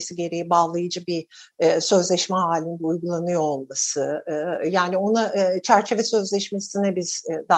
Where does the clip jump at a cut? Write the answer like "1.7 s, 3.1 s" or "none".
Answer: none